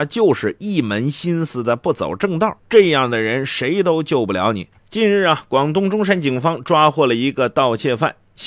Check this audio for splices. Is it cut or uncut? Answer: cut